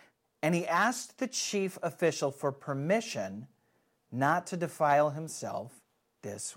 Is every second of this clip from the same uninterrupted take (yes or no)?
yes